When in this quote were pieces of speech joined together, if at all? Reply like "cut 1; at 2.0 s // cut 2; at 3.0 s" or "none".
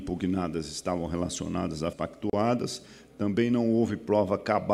cut 1; at 1.9 s